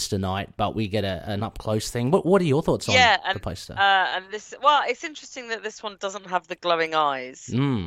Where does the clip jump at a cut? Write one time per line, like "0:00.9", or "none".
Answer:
none